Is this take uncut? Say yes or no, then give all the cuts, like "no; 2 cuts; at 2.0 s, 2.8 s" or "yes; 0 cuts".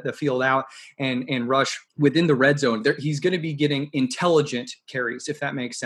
no; 1 cut; at 1.9 s